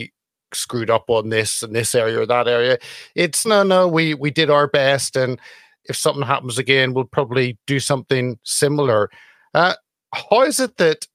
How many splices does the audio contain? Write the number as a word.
one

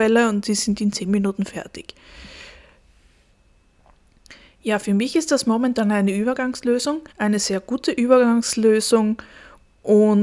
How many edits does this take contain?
one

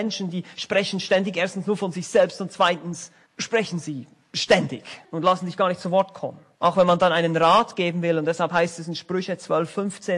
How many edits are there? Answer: three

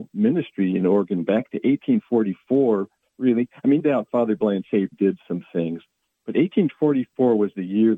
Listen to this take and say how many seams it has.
two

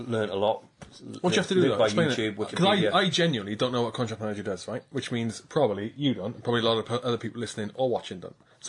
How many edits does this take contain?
zero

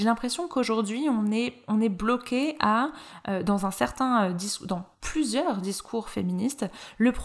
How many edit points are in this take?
one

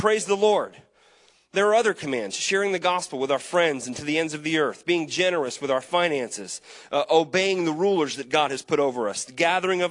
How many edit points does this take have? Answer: zero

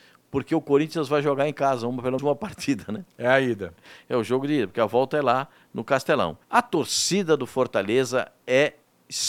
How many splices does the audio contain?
two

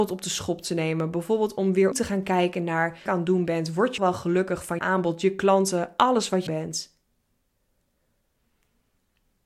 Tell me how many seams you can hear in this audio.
five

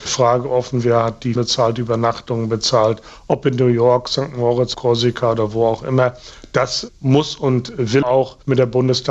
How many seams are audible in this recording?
three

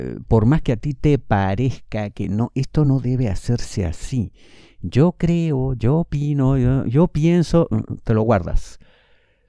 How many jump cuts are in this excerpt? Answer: zero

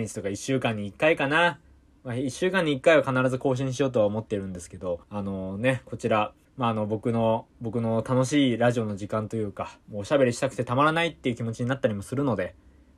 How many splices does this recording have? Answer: four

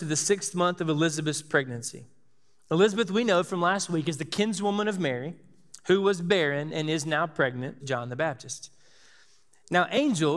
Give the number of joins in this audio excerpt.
one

